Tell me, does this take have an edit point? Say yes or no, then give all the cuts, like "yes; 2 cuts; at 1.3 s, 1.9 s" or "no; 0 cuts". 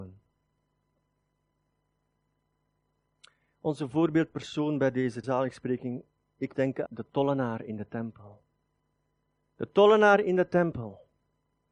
yes; 3 cuts; at 5.2 s, 6.5 s, 6.9 s